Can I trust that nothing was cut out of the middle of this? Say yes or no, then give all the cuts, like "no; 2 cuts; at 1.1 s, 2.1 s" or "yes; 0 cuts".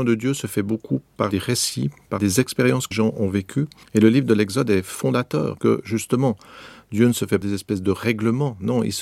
no; 6 cuts; at 1.3 s, 2.2 s, 2.9 s, 3.8 s, 5.6 s, 7.4 s